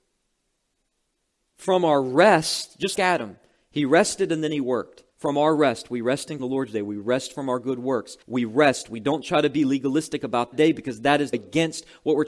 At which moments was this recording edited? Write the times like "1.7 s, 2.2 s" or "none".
2.9 s, 5.1 s, 6.4 s, 8.2 s, 10.5 s, 11.3 s

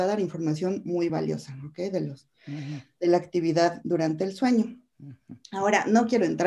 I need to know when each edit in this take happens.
none

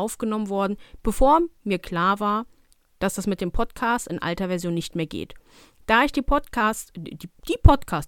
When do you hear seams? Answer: none

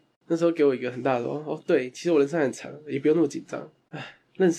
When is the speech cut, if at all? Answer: none

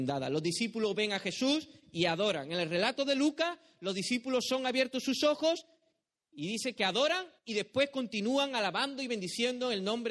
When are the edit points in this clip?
none

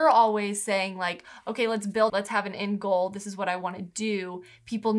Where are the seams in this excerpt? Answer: 2.1 s

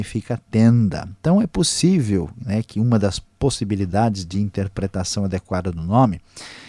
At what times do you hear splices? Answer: none

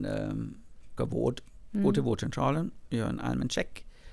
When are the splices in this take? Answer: 1.0 s

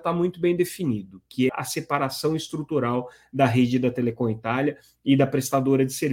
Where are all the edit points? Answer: 1.5 s

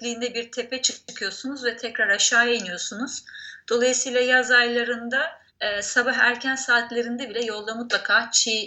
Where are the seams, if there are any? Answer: 5.5 s

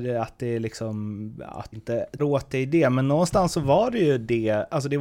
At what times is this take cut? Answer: 1.7 s, 2.2 s

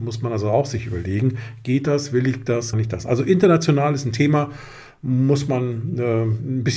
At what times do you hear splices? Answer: 2.7 s

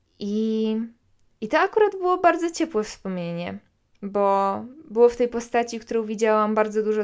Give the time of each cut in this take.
none

